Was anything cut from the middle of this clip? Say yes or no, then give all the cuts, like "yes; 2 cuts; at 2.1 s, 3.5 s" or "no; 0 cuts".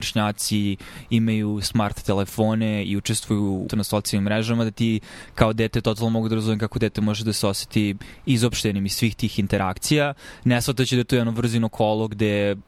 yes; 1 cut; at 3.7 s